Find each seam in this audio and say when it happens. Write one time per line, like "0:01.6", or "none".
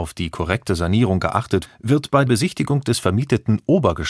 0:01.6
0:02.3